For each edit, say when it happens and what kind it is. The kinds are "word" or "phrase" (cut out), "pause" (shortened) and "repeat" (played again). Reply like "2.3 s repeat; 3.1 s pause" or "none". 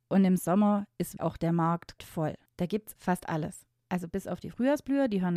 1.2 s word; 2.0 s word; 2.5 s pause; 3.0 s word